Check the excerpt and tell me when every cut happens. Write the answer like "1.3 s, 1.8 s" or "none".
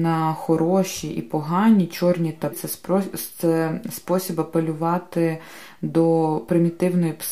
2.5 s